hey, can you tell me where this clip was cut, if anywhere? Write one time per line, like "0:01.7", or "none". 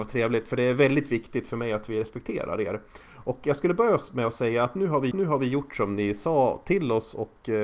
0:05.1